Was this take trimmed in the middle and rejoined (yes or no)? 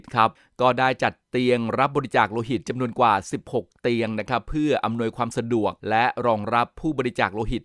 yes